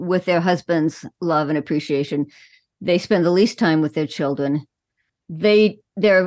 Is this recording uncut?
yes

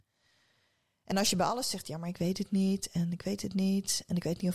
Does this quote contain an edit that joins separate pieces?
no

